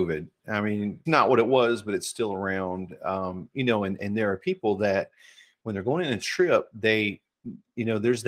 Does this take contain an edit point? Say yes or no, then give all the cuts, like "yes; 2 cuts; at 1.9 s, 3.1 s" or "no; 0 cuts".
yes; 1 cut; at 1.1 s